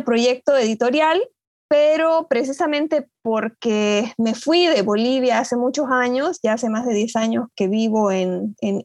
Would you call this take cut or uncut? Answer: uncut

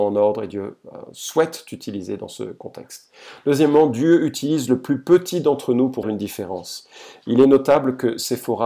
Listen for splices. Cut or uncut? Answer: cut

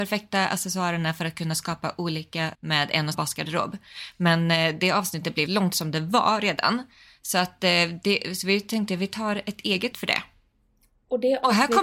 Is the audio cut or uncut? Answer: cut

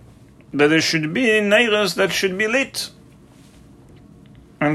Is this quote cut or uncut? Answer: uncut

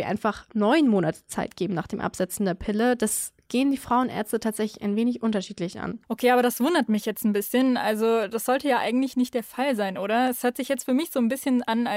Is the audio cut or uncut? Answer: cut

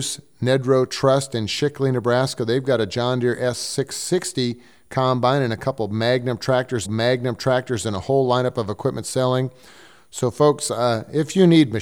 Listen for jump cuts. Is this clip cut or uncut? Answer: cut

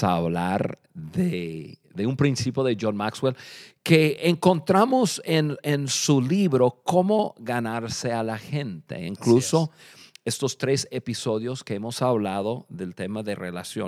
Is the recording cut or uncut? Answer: uncut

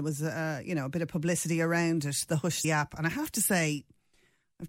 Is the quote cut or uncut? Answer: cut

